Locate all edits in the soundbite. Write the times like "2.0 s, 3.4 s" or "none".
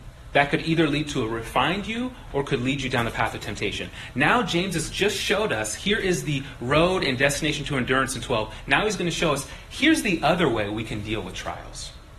none